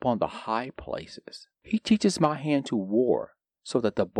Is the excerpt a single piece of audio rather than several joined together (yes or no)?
no